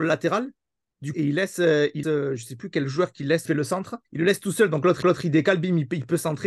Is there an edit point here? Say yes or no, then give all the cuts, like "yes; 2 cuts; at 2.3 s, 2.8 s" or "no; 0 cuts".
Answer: yes; 5 cuts; at 1.1 s, 2.0 s, 3.4 s, 4.0 s, 5.0 s